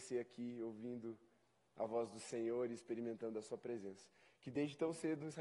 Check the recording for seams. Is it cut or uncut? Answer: uncut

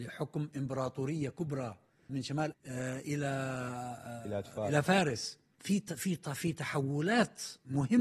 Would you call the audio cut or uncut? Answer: cut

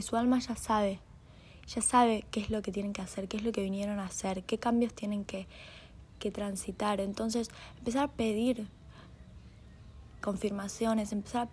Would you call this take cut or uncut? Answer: cut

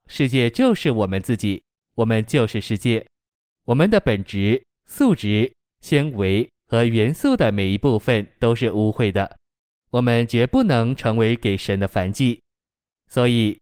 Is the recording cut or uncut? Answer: uncut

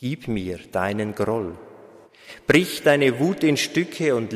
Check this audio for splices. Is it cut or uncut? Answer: uncut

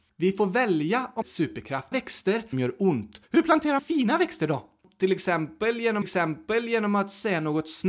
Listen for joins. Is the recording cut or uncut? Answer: cut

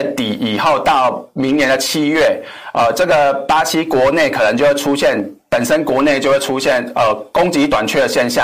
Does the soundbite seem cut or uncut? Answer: uncut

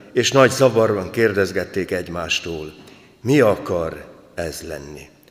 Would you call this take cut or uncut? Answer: uncut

